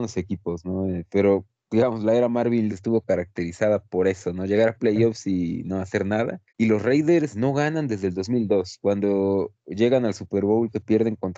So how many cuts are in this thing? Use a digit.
2